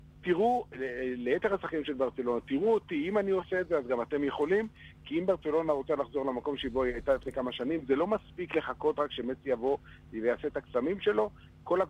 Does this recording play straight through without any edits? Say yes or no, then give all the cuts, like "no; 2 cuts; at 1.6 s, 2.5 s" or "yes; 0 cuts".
yes; 0 cuts